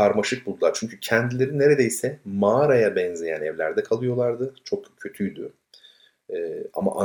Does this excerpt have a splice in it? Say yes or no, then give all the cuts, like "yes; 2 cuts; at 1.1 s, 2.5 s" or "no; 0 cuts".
no; 0 cuts